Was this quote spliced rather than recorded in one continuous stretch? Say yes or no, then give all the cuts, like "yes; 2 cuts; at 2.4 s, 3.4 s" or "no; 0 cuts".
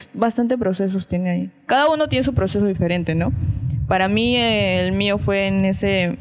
no; 0 cuts